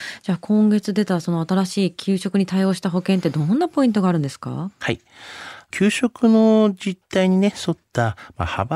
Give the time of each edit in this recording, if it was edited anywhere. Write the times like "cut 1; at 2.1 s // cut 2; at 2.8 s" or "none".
none